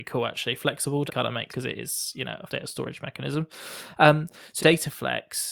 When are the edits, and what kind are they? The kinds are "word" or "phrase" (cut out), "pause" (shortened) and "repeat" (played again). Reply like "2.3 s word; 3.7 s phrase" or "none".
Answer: 1.1 s word; 1.5 s word; 2.5 s word; 4.6 s word